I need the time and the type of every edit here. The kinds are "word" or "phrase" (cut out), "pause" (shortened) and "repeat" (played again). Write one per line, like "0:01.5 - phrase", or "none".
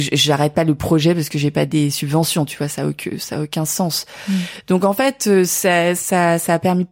none